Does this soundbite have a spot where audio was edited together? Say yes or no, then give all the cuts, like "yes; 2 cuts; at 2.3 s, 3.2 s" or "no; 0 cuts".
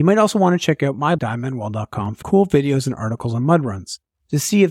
yes; 2 cuts; at 1.2 s, 2.2 s